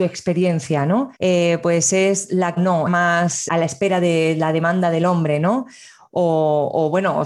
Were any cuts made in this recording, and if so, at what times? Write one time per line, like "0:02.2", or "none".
0:01.2
0:02.6
0:02.9
0:03.5